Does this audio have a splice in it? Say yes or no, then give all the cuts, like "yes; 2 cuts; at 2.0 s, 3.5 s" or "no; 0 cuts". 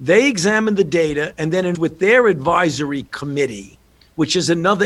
yes; 1 cut; at 1.7 s